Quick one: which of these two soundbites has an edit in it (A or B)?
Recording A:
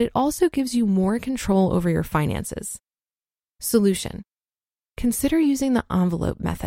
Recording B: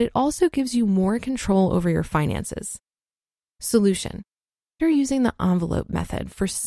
B